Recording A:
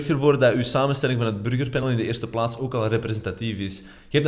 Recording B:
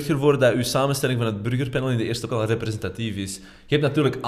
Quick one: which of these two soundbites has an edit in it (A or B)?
B